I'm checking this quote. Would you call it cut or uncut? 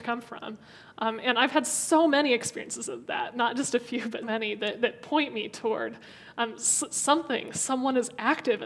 cut